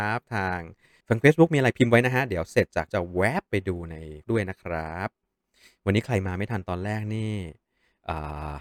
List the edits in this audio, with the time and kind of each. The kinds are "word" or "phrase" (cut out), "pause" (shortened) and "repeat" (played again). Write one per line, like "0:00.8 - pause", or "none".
0:01.0 - word
0:02.9 - word
0:04.2 - word